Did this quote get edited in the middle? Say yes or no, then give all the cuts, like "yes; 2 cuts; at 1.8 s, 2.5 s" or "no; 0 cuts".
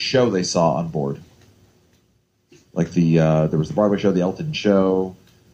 yes; 1 cut; at 4.5 s